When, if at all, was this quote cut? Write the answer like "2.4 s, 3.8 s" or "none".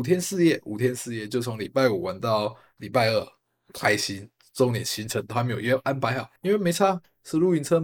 6.4 s